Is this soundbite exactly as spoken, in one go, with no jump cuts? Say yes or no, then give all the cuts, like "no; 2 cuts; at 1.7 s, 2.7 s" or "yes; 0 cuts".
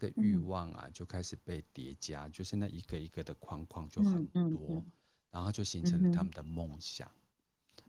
yes; 0 cuts